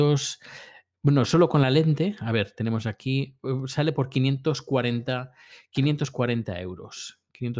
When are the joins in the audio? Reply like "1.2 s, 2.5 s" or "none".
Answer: none